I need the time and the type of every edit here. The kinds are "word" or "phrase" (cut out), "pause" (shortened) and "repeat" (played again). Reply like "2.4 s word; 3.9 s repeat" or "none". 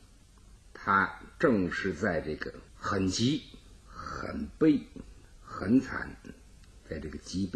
2.7 s pause; 3.8 s pause